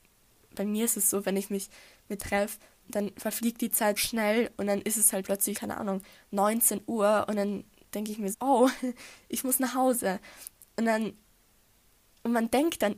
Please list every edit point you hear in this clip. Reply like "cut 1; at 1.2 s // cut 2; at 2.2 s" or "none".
cut 1; at 2.2 s // cut 2; at 2.8 s // cut 3; at 4.0 s // cut 4; at 5.2 s // cut 5; at 5.5 s // cut 6; at 8.3 s